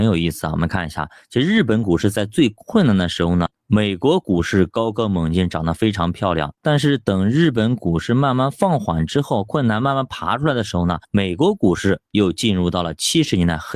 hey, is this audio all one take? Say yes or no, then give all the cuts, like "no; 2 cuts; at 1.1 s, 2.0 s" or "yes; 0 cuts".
no; 3 cuts; at 3.5 s, 6.6 s, 11.0 s